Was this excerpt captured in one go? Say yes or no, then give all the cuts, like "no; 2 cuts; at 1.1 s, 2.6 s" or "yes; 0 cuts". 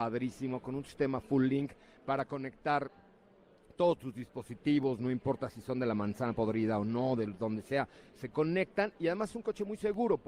yes; 0 cuts